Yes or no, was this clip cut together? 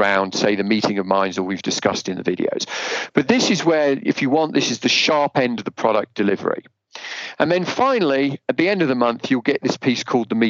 no